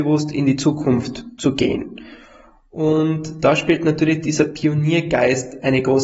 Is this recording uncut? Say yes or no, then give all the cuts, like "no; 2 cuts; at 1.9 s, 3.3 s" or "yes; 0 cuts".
yes; 0 cuts